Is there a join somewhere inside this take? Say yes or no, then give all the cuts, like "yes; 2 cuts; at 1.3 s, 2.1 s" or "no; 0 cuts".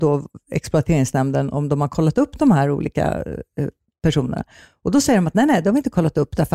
no; 0 cuts